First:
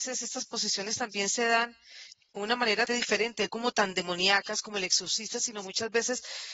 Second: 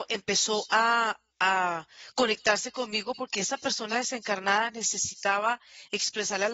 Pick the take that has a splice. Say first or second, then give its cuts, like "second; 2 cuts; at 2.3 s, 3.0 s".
first; 3 cuts; at 2.4 s, 2.9 s, 3.5 s